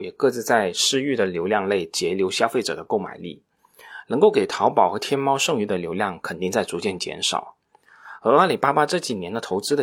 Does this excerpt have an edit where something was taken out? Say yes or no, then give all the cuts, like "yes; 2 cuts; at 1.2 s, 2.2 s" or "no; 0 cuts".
no; 0 cuts